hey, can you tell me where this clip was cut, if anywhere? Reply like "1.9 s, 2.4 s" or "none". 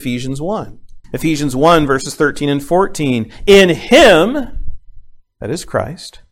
1.0 s